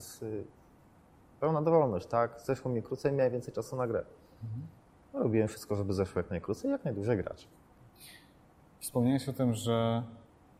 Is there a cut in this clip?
no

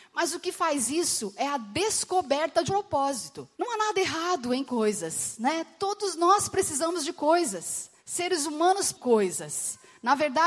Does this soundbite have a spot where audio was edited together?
yes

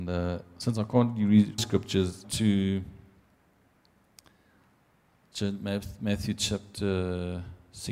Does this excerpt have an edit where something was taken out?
yes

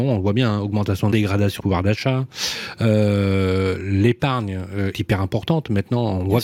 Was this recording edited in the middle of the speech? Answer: yes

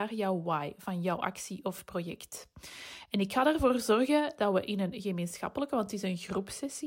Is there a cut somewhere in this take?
no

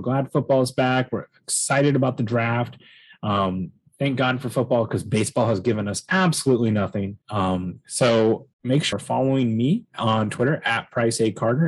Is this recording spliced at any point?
yes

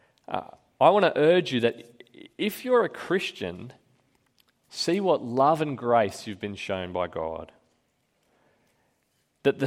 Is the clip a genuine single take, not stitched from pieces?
yes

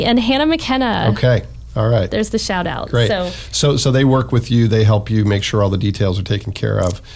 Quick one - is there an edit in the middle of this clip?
no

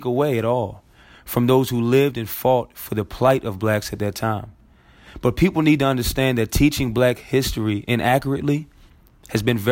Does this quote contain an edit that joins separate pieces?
no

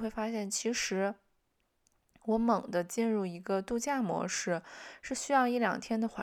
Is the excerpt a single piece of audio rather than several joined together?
yes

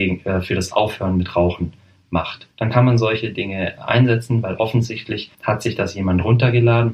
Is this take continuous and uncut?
no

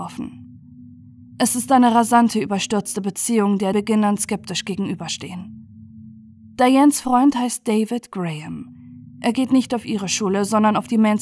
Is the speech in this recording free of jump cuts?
no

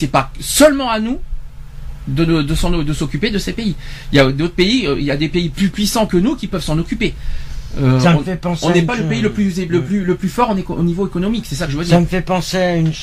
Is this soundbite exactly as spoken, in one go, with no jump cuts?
yes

